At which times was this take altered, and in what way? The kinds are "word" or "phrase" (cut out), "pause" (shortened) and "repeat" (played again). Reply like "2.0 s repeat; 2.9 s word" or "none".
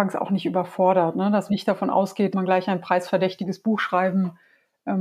1.5 s word; 2.3 s word